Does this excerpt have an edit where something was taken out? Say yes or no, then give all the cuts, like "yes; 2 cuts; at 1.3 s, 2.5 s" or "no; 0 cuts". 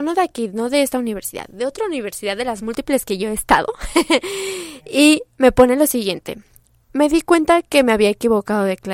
no; 0 cuts